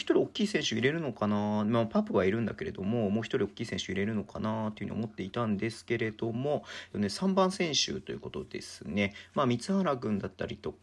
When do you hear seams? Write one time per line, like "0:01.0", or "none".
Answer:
0:06.9